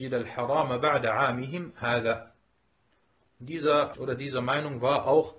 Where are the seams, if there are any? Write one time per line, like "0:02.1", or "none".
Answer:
0:03.9